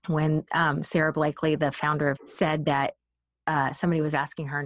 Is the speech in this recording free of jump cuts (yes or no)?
no